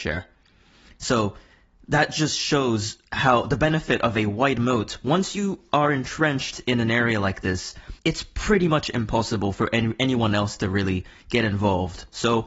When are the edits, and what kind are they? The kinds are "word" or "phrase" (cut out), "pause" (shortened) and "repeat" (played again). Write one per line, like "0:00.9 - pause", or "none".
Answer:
0:08.0 - pause